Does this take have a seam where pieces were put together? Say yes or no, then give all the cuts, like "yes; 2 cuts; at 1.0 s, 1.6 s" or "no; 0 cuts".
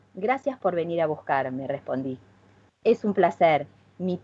no; 0 cuts